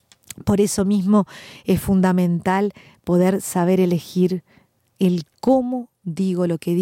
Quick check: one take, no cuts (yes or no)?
yes